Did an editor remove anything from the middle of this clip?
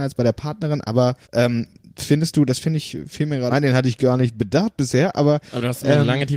yes; 2 cuts; at 1.2 s, 3.5 s

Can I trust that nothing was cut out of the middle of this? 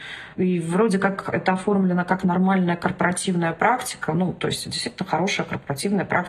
yes; 0 cuts

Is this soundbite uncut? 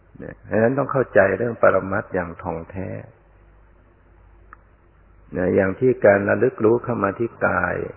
no; 1 cut; at 4.9 s

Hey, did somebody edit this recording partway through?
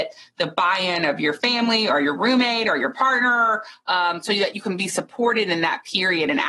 no; 0 cuts

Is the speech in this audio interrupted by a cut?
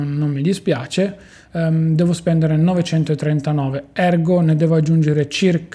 no; 0 cuts

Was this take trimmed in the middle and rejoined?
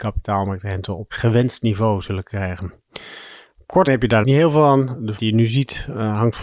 yes; 4 cuts; at 1.1 s, 3.9 s, 4.2 s, 5.2 s

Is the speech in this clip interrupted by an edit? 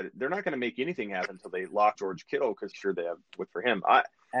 yes; 3 cuts; at 2.0 s, 2.7 s, 3.5 s

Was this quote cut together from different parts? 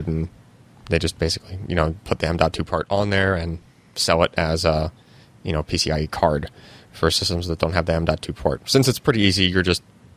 no; 0 cuts

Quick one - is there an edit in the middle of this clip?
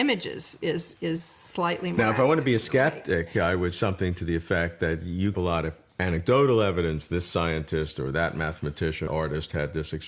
yes; 3 cuts; at 3.7 s, 5.3 s, 9.1 s

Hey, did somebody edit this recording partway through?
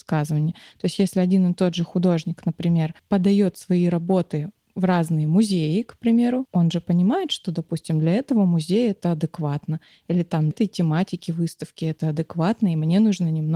yes; 1 cut; at 10.5 s

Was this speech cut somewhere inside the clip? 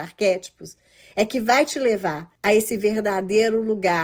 yes; 1 cut; at 2.4 s

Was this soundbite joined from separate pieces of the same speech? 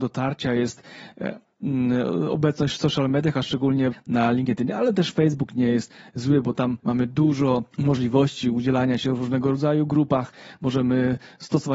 yes; 3 cuts; at 3.9 s, 6.8 s, 7.7 s

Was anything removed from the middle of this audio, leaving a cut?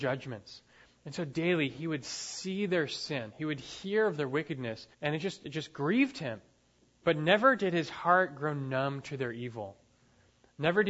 yes; 2 cuts; at 4.9 s, 6.8 s

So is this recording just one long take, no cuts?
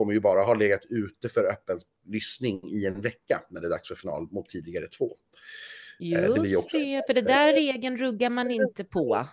yes; 0 cuts

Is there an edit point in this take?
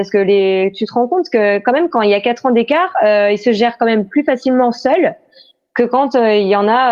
no; 0 cuts

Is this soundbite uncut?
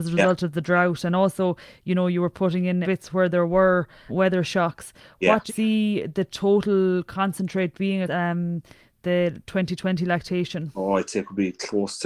no; 4 cuts; at 2.8 s, 4.1 s, 5.5 s, 8.1 s

